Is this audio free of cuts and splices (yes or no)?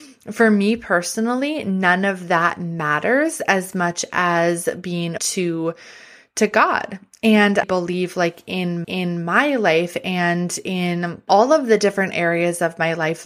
no